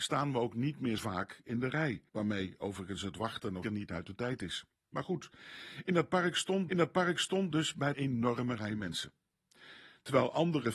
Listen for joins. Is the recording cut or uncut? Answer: cut